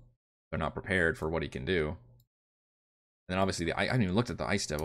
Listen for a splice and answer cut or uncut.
uncut